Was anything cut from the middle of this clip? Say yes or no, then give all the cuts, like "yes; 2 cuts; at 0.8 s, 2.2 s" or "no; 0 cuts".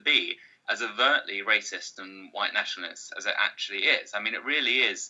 no; 0 cuts